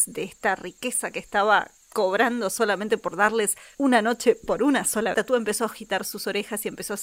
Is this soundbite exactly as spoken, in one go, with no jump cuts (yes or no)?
no